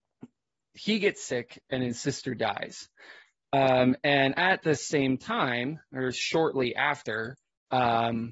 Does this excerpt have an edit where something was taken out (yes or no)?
no